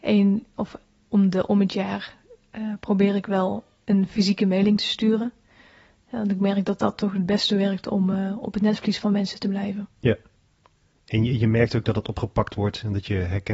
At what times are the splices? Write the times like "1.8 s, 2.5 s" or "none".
none